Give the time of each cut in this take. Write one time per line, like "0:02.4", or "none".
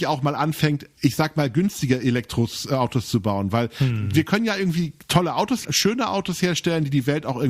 0:05.6